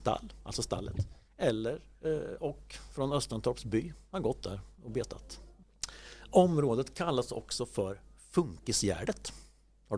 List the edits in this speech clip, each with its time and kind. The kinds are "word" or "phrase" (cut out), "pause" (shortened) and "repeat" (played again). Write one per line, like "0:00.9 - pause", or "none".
0:01.3 - pause